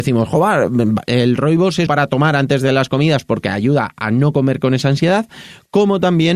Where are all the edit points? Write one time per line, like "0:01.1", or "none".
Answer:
0:01.9